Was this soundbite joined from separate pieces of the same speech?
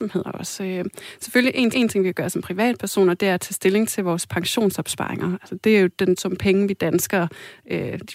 yes; 2 cuts; at 1.7 s, 6.2 s

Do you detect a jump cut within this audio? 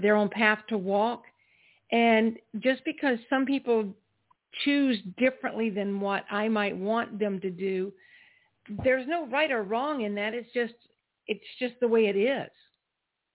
no; 0 cuts

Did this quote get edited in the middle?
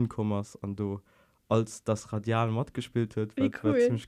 no; 0 cuts

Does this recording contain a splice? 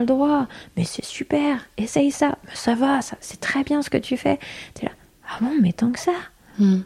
no; 0 cuts

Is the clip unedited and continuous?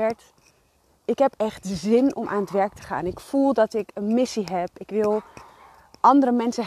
yes; 0 cuts

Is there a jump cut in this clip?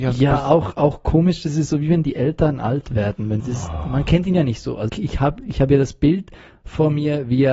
yes; 2 cuts; at 3.4 s, 4.9 s

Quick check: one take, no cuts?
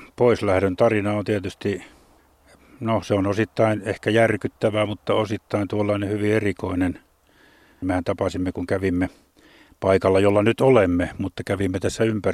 yes; 0 cuts

